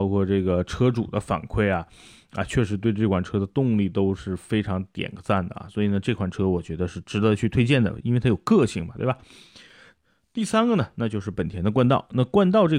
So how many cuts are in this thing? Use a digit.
0